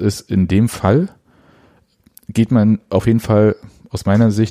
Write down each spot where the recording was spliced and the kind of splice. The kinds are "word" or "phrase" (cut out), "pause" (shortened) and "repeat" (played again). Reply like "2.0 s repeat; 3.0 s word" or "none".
none